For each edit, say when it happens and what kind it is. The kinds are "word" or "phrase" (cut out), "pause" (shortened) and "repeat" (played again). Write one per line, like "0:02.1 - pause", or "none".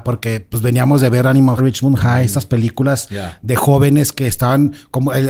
0:01.6 - phrase

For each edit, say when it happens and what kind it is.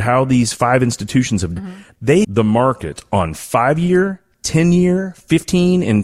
0:01.6 - word
0:02.2 - phrase

